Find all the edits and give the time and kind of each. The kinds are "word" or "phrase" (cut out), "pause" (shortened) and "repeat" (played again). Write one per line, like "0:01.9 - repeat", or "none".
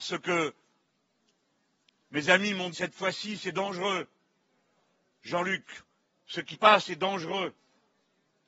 0:02.7 - word
0:06.5 - word